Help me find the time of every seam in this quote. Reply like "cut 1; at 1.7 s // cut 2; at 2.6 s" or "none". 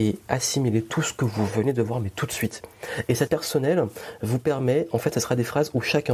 cut 1; at 3.3 s